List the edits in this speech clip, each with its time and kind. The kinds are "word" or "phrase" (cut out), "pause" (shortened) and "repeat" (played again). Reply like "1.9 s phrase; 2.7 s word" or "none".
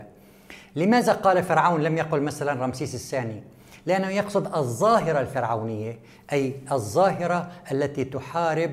none